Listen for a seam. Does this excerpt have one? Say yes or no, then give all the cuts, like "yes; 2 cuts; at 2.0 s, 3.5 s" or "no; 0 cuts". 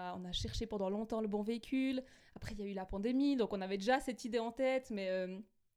no; 0 cuts